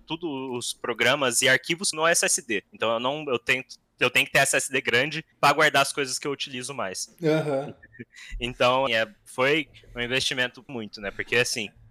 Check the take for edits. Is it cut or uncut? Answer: cut